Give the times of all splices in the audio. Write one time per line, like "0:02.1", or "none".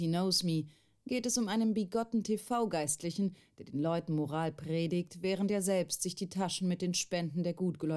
none

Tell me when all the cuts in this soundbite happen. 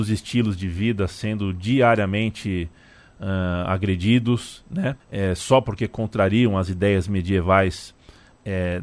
0:05.0

